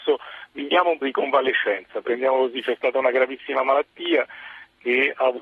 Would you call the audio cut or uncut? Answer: cut